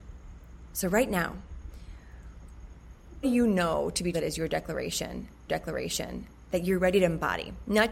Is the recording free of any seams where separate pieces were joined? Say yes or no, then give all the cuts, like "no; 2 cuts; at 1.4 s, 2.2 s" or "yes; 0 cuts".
no; 3 cuts; at 3.2 s, 4.1 s, 5.5 s